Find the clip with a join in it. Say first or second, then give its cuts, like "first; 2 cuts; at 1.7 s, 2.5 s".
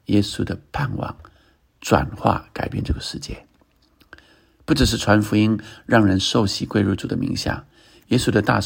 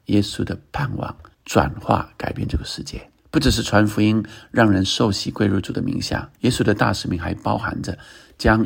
second; 3 cuts; at 1.3 s, 3.2 s, 6.3 s